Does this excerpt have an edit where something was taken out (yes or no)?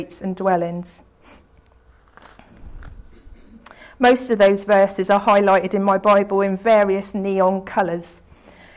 no